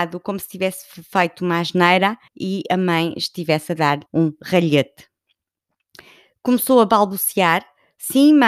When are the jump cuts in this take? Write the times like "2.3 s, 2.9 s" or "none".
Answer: 2.3 s, 4.1 s